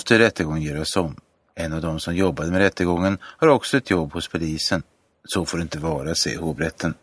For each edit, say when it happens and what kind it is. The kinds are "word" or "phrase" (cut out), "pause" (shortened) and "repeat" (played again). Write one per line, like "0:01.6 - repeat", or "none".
none